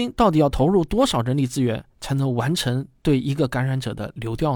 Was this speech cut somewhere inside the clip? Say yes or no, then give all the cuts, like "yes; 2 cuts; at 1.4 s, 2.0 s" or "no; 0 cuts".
no; 0 cuts